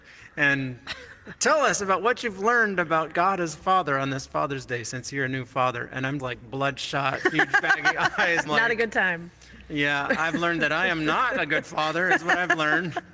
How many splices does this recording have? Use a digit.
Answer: 2